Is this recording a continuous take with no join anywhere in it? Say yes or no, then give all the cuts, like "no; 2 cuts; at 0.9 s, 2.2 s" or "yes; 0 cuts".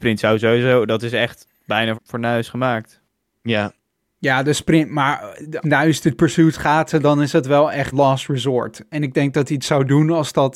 no; 5 cuts; at 1.9 s, 5.6 s, 6.2 s, 6.5 s, 7.9 s